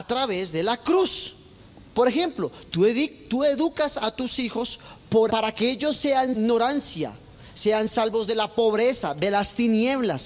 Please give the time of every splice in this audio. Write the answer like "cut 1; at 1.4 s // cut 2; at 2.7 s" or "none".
cut 1; at 5.3 s // cut 2; at 6.3 s